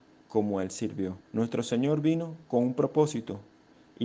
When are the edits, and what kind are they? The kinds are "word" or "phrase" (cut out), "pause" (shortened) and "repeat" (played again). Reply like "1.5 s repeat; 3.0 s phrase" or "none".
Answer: 1.2 s pause